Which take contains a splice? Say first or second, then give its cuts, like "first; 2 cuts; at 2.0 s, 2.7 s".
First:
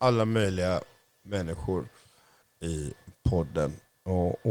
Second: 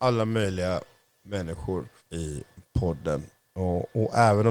second; 1 cut; at 2.0 s